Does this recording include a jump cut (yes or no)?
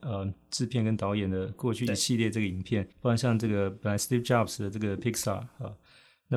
yes